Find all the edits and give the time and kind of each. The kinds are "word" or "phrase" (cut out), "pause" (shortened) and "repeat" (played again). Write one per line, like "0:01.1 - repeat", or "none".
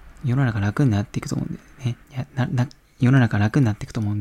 0:02.0 - pause